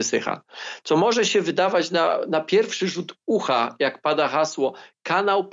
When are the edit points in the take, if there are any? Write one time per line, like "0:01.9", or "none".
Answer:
none